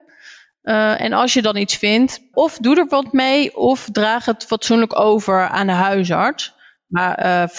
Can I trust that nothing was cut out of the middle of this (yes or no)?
no